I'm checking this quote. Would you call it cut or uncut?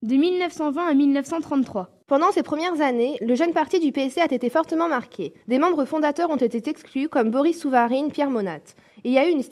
cut